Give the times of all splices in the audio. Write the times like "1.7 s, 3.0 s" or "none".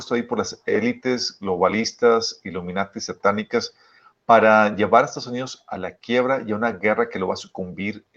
none